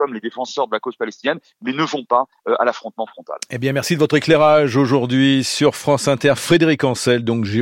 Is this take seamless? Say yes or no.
yes